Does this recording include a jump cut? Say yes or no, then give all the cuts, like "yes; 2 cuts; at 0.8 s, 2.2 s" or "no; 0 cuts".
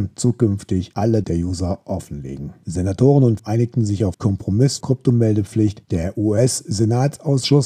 yes; 4 cuts; at 1.2 s, 3.4 s, 4.1 s, 4.8 s